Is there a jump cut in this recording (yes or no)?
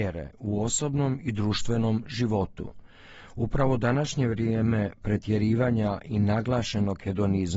no